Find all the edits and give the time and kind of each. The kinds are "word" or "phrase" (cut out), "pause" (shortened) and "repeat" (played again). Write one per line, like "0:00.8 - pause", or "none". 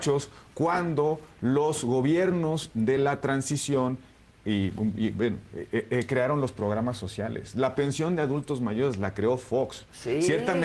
none